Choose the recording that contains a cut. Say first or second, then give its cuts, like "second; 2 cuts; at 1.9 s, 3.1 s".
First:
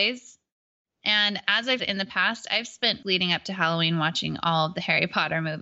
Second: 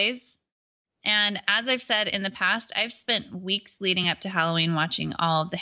first; 2 cuts; at 1.8 s, 3.0 s